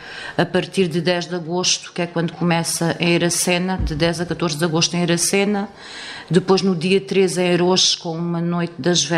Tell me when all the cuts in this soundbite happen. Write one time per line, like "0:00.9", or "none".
none